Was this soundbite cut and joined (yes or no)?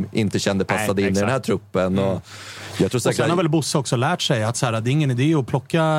no